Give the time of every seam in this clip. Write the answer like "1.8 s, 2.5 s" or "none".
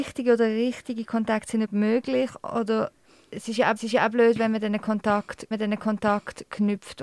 1.6 s, 3.0 s, 3.8 s, 5.5 s